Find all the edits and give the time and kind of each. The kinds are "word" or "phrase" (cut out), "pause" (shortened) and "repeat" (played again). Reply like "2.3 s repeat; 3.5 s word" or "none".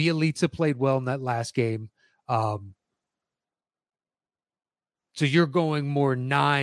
none

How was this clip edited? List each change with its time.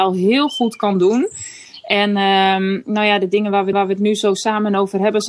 3.7 s repeat

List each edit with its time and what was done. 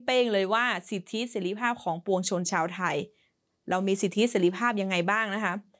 none

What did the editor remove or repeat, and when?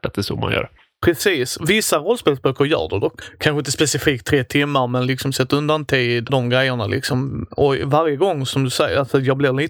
6.3 s word

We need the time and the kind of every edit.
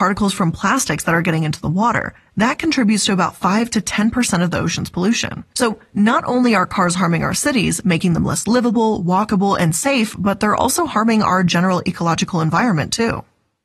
5.5 s pause

